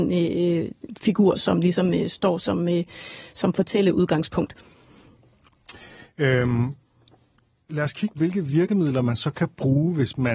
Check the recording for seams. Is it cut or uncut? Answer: cut